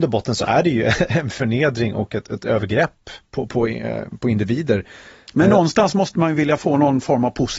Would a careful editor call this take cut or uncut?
uncut